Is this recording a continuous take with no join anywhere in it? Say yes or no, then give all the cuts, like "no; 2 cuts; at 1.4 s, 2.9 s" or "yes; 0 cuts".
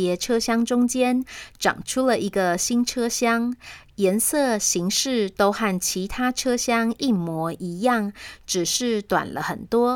yes; 0 cuts